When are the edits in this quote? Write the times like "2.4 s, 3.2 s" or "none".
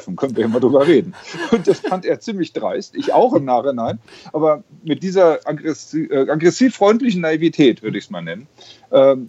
none